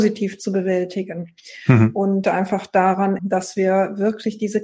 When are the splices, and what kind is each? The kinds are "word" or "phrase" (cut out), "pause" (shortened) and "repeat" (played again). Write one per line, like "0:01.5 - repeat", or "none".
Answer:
0:02.2 - phrase
0:03.2 - word